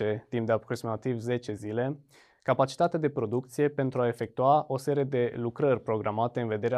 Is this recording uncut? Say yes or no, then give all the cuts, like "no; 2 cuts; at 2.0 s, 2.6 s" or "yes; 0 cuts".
yes; 0 cuts